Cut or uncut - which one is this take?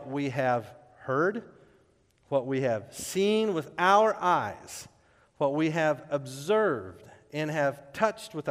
uncut